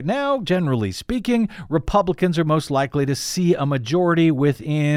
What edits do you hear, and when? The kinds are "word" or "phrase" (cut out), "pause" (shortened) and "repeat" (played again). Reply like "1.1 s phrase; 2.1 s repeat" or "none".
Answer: none